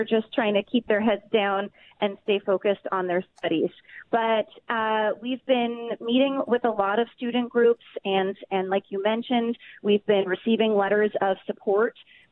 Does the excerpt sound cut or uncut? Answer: uncut